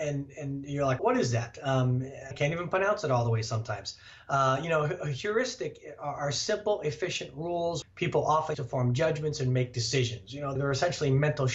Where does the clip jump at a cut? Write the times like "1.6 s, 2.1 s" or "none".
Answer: 1.0 s, 2.3 s, 7.8 s, 8.5 s, 10.6 s